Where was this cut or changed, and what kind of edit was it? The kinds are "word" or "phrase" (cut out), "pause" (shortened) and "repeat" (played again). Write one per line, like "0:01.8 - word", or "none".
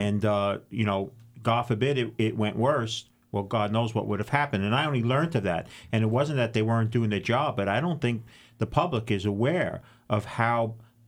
none